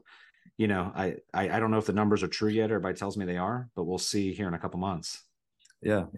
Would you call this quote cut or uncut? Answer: uncut